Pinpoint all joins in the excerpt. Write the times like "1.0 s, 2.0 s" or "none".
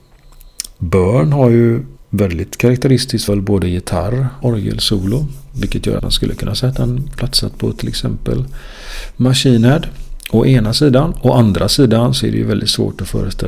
2.0 s, 3.3 s, 4.4 s, 6.0 s, 7.2 s

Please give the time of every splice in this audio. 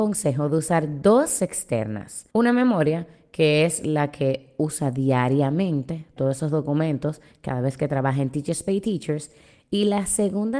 1.4 s, 2.3 s, 6.2 s

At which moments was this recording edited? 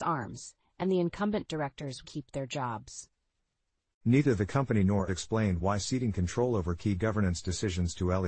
2.0 s, 5.1 s

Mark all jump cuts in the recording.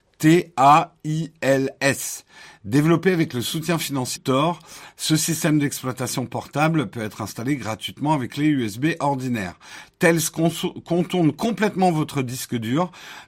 4.2 s, 8.3 s

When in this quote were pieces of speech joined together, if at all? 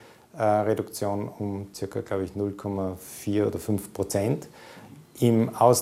none

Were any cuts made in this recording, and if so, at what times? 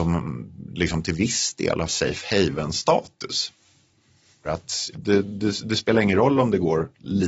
1.9 s, 4.4 s, 4.9 s

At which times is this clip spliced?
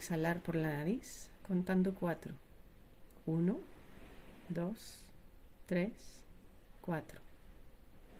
none

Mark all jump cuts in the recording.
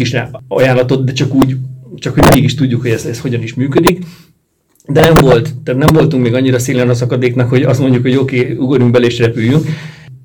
none

